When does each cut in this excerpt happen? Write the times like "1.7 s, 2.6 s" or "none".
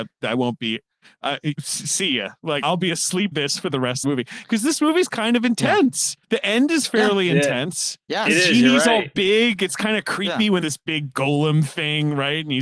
1.5 s, 2.6 s, 3.3 s, 4.0 s, 6.2 s, 8.0 s, 10.6 s, 11.1 s